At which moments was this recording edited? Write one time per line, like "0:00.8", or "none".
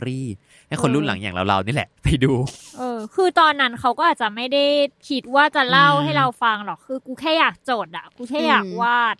0:02.0